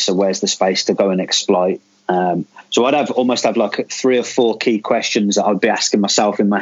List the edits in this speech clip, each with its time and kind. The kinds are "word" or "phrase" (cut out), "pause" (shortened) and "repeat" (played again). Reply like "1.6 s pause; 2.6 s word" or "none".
none